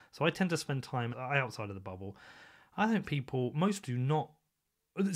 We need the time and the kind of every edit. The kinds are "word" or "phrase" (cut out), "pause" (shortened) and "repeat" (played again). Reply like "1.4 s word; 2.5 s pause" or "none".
1.1 s word; 3.0 s word; 3.8 s word